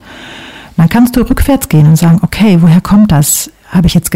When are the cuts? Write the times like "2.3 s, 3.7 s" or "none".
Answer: none